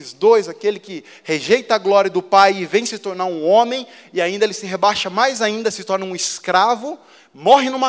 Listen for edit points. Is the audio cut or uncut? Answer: uncut